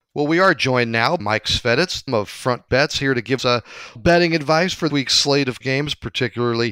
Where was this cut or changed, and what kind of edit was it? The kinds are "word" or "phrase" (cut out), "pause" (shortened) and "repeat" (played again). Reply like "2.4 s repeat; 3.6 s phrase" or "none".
1.2 s word; 2.1 s word; 2.7 s word; 3.4 s word; 4.0 s word; 4.9 s word; 5.6 s word